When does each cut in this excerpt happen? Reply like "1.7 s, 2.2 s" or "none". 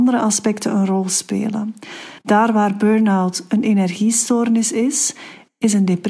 2.2 s